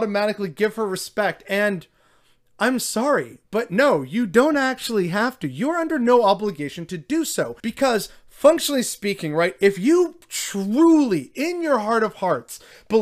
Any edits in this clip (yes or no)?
yes